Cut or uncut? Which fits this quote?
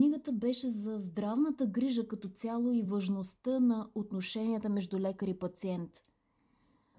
uncut